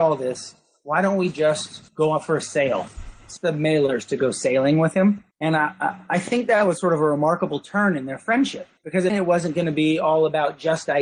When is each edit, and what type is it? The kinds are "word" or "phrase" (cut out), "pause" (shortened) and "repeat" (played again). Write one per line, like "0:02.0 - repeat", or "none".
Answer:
0:01.9 - pause
0:03.4 - phrase
0:05.3 - pause
0:08.8 - pause
0:09.1 - word